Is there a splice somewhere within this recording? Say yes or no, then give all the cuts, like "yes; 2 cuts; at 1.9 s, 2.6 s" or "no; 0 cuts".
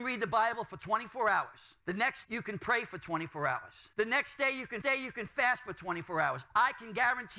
yes; 4 cuts; at 1.8 s, 2.2 s, 3.9 s, 4.8 s